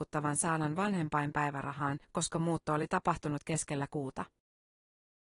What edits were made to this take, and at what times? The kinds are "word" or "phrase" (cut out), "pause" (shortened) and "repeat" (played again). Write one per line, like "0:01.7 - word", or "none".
0:02.0 - pause